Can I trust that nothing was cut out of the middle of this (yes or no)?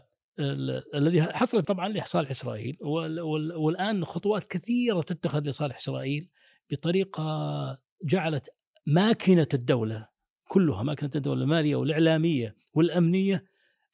no